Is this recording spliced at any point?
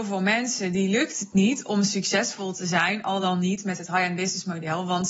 no; 0 cuts

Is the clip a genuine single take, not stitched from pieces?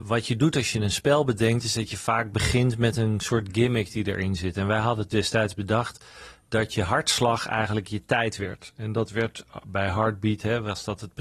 yes; 0 cuts

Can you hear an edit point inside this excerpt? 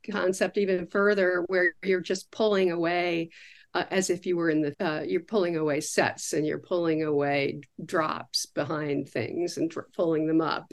yes; 1 cut; at 4.7 s

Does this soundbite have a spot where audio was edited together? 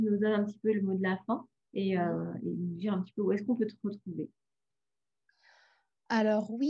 yes; 1 cut; at 1.6 s

